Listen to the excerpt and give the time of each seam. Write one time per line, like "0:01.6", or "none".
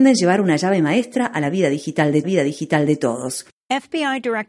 0:02.2